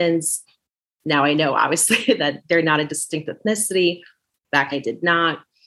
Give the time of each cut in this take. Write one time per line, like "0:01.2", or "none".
0:04.7